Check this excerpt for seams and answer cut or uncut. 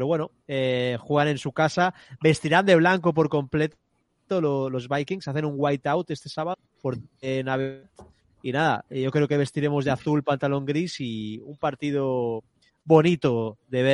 uncut